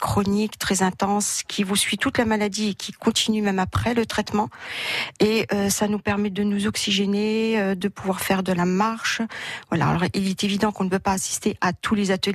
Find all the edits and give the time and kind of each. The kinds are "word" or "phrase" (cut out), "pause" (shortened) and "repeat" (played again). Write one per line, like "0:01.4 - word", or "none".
none